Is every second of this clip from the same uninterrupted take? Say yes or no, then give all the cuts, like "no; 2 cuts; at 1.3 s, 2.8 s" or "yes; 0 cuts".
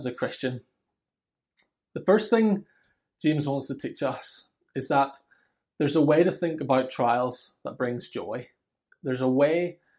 yes; 0 cuts